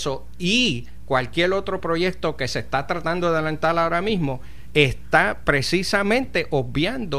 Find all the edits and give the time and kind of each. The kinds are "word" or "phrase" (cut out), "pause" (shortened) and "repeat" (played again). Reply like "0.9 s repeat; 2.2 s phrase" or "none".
none